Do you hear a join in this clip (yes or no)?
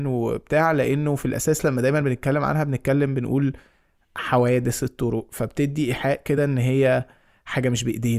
no